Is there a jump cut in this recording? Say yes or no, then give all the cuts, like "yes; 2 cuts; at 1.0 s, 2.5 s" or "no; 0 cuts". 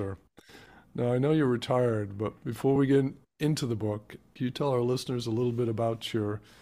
no; 0 cuts